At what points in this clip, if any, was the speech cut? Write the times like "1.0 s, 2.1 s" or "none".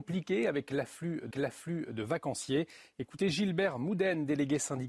1.3 s